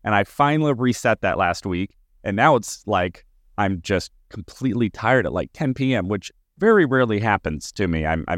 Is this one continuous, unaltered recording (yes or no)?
yes